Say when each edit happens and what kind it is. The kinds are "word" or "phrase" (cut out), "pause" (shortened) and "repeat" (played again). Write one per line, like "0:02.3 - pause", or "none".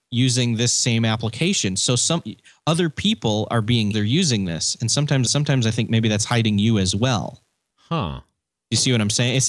0:03.9 - phrase
0:05.3 - repeat